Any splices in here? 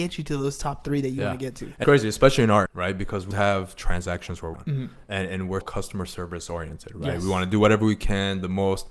yes; 5 cuts; at 1.8 s, 2.7 s, 3.3 s, 4.5 s, 5.6 s

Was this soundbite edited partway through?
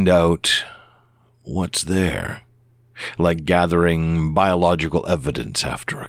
no; 0 cuts

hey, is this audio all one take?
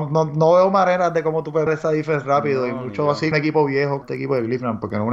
no; 3 cuts; at 1.7 s, 3.3 s, 4.0 s

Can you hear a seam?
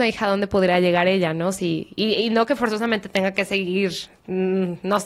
no; 0 cuts

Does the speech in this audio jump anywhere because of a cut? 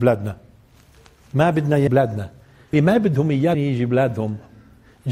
yes; 3 cuts; at 1.9 s, 2.7 s, 3.5 s

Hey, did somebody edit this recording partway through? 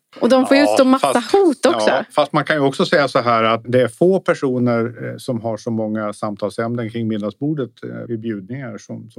yes; 2 cuts; at 3.6 s, 8.1 s

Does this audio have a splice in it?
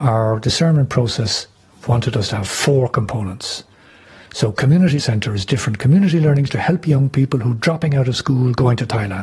yes; 2 cuts; at 5.0 s, 6.5 s

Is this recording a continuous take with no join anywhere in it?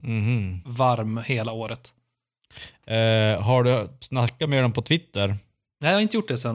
yes; 0 cuts

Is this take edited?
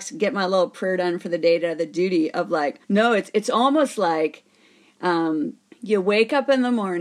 yes; 2 cuts; at 2.8 s, 5.7 s

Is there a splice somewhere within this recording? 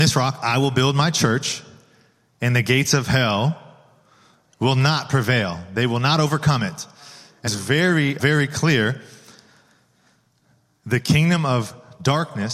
yes; 2 cuts; at 7.5 s, 8.2 s

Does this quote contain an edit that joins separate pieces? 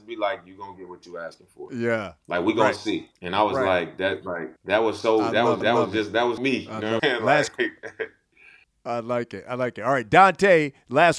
yes; 5 cuts; at 3.2 s, 4.6 s, 5.6 s, 6.4 s, 7.0 s

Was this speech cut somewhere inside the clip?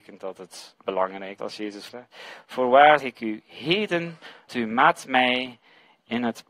yes; 4 cuts; at 1.4 s, 1.9 s, 3.0 s, 4.5 s

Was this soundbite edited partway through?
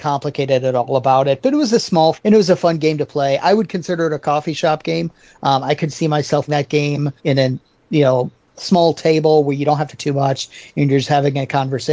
yes; 5 cuts; at 2.1 s, 6.5 s, 7.2 s, 8.5 s, 10.0 s

